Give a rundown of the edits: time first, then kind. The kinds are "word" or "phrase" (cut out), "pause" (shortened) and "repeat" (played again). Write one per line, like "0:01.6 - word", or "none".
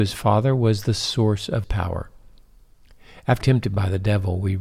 0:01.6 - word
0:03.4 - word